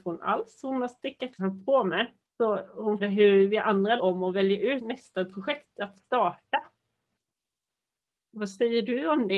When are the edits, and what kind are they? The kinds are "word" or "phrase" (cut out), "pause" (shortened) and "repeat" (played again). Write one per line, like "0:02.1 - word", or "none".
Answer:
0:01.4 - phrase
0:02.2 - pause
0:03.0 - word
0:04.0 - word
0:04.8 - word